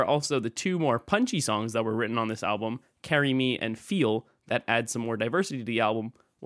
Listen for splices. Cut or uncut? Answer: uncut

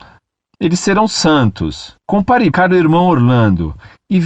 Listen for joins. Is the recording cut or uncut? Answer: cut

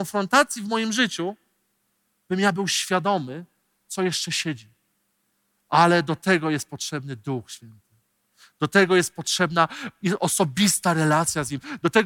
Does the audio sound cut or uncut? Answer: uncut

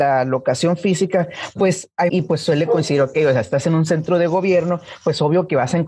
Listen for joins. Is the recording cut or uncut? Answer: cut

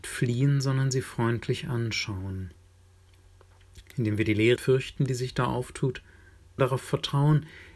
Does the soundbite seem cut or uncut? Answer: cut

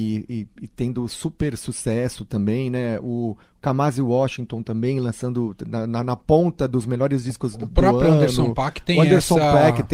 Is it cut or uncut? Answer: uncut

